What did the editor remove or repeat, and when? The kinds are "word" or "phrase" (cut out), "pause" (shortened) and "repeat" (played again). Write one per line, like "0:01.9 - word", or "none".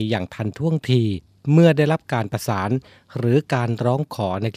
none